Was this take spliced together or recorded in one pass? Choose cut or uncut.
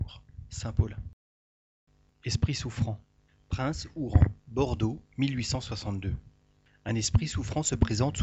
uncut